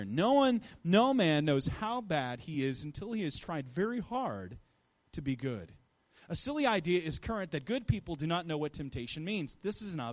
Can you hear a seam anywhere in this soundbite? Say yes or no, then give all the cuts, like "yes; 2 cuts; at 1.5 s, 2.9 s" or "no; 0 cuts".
no; 0 cuts